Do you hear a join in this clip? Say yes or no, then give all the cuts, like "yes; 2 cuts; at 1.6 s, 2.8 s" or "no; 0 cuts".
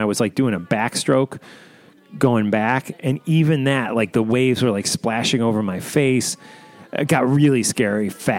no; 0 cuts